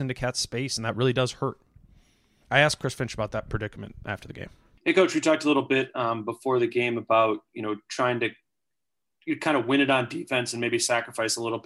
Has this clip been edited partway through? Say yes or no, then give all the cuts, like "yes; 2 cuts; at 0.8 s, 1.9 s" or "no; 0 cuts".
no; 0 cuts